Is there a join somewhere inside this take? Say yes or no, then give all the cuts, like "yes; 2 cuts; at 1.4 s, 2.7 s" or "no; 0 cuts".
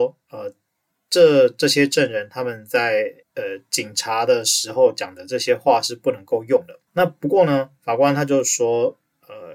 yes; 2 cuts; at 3.2 s, 6.9 s